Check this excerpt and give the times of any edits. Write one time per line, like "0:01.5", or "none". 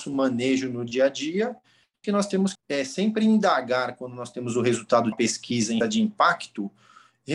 0:02.0
0:02.5
0:05.1
0:05.8